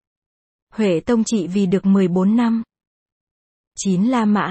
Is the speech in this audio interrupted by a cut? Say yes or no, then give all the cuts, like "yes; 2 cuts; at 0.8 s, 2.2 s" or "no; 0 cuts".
no; 0 cuts